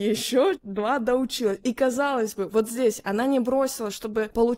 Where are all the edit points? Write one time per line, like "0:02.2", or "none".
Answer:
none